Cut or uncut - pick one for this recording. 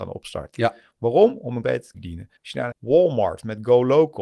cut